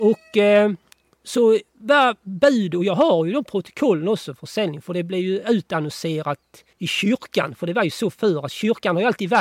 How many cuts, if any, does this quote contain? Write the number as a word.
two